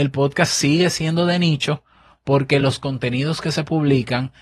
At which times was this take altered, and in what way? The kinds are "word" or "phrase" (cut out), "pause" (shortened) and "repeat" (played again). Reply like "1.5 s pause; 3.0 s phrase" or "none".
none